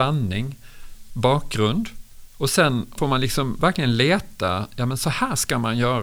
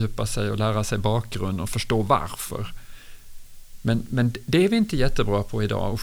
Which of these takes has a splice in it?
first; 2 cuts; at 1.1 s, 3.0 s

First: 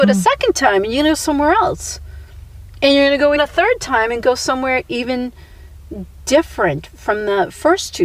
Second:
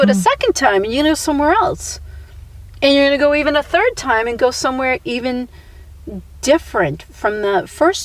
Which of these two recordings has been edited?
first; 1 cut; at 3.4 s

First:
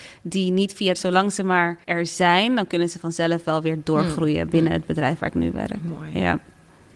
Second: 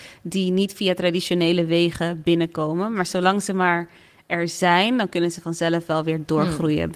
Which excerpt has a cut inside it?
first; 3 cuts; at 0.9 s, 1.8 s, 4.5 s

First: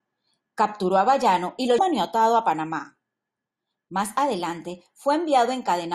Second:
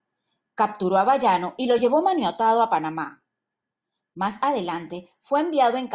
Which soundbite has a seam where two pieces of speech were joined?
first; 1 cut; at 1.8 s

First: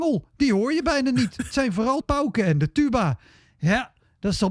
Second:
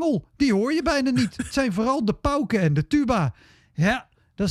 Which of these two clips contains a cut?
first; 1 cut; at 2.0 s

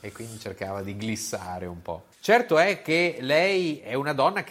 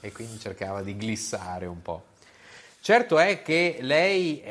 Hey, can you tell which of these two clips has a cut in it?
first; 1 cut; at 2.1 s

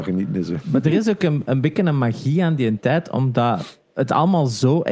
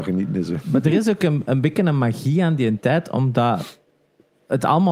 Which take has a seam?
first; 1 cut; at 3.8 s

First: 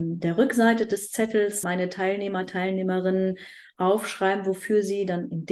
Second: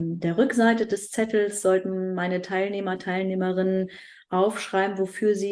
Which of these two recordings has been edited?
first; 1 cut; at 1.6 s

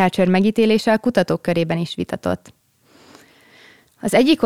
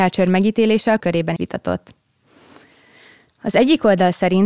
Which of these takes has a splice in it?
second; 2 cuts; at 1.0 s, 1.4 s

